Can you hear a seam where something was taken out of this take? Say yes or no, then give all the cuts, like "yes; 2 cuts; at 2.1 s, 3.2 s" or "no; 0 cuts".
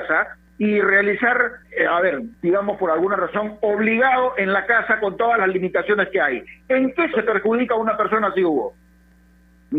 yes; 3 cuts; at 1.6 s, 2.4 s, 7.1 s